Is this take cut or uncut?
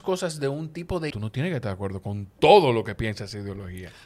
cut